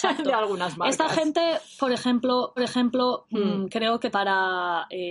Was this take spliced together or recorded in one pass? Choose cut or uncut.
cut